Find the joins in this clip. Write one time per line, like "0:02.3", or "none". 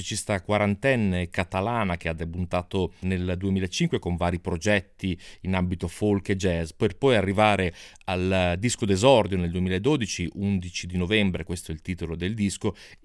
0:03.0